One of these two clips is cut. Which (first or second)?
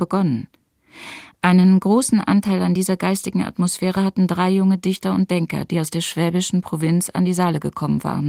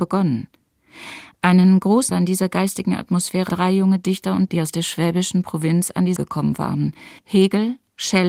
second